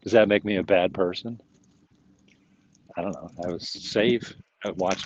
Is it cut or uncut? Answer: uncut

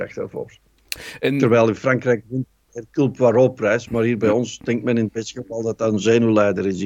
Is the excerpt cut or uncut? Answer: uncut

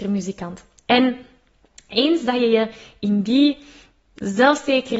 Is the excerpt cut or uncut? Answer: uncut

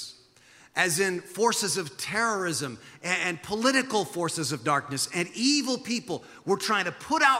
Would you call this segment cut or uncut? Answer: uncut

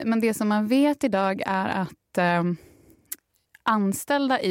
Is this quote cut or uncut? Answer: uncut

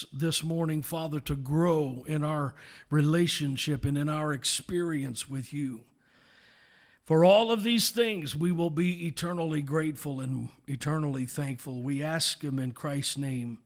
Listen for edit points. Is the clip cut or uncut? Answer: uncut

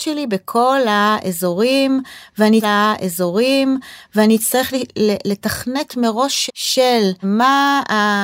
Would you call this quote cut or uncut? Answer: cut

